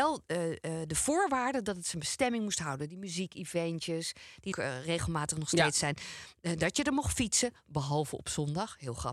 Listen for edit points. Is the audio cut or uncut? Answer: cut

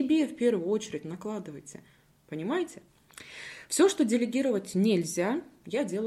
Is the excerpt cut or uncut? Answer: uncut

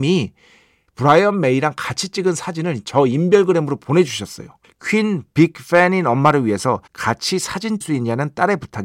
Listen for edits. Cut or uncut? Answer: cut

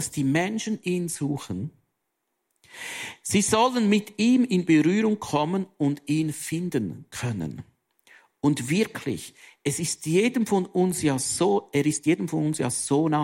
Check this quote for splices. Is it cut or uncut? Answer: uncut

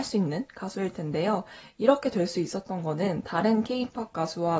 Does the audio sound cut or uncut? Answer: uncut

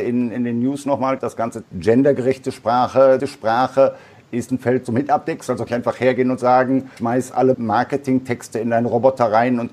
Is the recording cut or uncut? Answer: cut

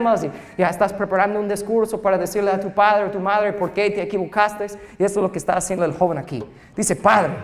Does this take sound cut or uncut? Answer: uncut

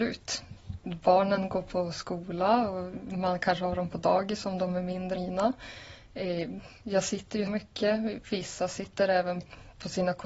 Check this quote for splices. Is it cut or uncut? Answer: cut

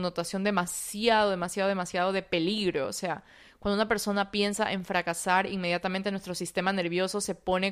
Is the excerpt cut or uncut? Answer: uncut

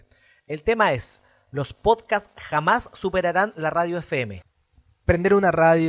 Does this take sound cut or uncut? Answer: uncut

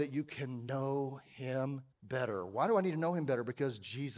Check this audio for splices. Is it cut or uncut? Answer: cut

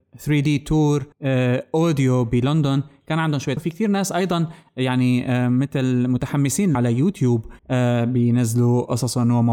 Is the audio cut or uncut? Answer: cut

